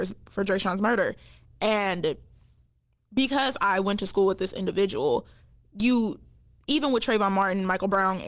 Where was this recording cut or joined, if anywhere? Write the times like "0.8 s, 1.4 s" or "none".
none